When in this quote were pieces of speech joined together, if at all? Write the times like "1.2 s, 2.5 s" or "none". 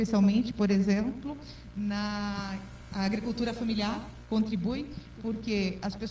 5.2 s